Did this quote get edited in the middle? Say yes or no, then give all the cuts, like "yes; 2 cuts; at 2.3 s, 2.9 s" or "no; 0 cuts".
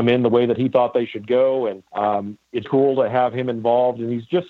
yes; 2 cuts; at 1.9 s, 2.6 s